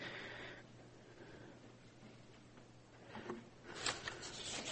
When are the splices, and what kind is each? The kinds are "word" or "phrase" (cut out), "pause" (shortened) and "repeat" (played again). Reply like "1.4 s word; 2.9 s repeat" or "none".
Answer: none